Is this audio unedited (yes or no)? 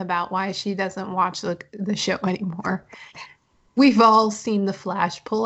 yes